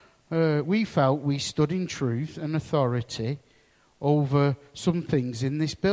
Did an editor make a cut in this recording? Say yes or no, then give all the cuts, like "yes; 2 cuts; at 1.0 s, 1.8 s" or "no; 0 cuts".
no; 0 cuts